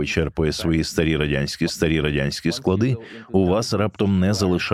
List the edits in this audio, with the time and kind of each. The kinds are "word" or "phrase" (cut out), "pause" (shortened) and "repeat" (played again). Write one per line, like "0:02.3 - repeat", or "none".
0:01.7 - repeat